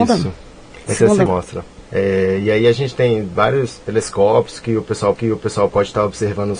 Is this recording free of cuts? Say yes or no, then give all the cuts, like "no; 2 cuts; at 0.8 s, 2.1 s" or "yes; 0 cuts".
no; 4 cuts; at 1.3 s, 1.9 s, 3.8 s, 5.2 s